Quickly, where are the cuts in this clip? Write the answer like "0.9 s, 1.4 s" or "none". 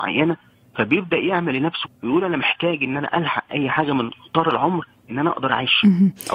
1.8 s